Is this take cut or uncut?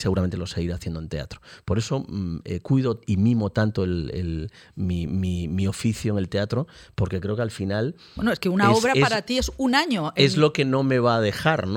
uncut